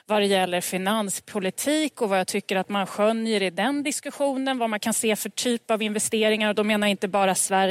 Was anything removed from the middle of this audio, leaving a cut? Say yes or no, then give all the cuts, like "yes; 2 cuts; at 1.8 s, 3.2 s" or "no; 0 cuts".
no; 0 cuts